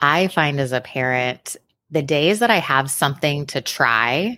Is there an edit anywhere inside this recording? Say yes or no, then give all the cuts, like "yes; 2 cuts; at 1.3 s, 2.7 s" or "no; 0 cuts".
no; 0 cuts